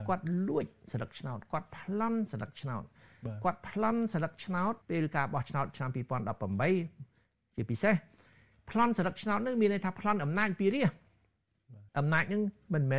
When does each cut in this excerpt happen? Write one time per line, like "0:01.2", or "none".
0:04.8
0:11.9